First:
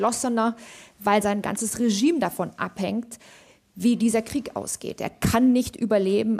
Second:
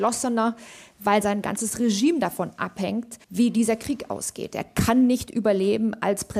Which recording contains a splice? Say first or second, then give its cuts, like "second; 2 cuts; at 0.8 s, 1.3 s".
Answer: second; 1 cut; at 3.2 s